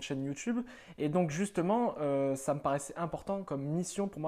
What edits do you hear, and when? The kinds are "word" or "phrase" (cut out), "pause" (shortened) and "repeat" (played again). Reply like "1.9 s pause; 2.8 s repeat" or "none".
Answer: none